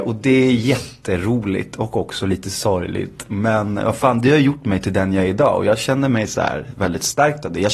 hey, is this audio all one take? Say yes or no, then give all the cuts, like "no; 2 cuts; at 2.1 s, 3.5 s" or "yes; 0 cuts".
yes; 0 cuts